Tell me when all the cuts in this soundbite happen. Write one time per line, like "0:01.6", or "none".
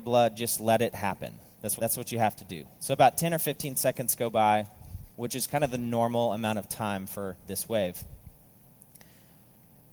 0:01.8
0:05.1